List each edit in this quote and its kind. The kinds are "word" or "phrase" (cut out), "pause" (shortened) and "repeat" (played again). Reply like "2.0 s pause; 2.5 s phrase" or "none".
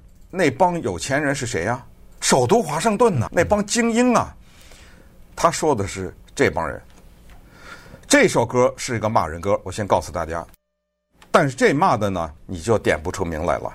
3.3 s word; 12.4 s pause

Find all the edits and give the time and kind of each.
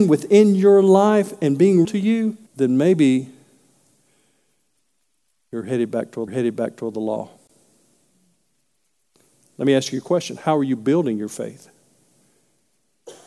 1.8 s word; 2.5 s pause; 6.3 s repeat

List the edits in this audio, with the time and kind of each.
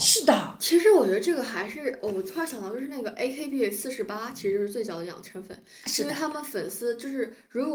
none

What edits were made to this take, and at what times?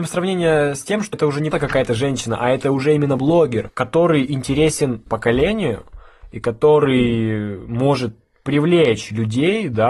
1.1 s word; 1.5 s word; 3.2 s word; 5.1 s word

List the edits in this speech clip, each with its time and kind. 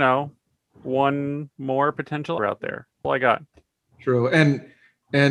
2.4 s word; 3.0 s phrase

